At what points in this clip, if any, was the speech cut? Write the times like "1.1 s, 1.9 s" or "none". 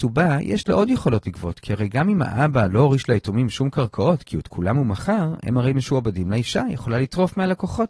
none